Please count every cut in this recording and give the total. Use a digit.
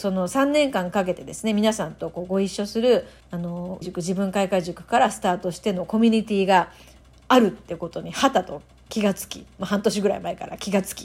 3